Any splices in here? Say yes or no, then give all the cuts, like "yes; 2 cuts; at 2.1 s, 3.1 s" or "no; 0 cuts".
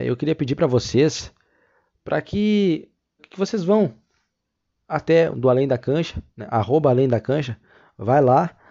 yes; 3 cuts; at 3.2 s, 5.3 s, 6.3 s